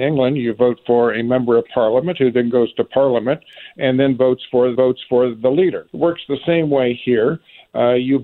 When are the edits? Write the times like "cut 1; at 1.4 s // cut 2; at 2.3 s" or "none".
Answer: cut 1; at 4.8 s // cut 2; at 5.9 s